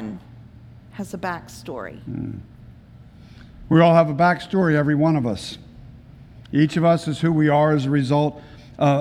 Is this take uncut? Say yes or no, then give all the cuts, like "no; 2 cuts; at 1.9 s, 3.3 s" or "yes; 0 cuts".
yes; 0 cuts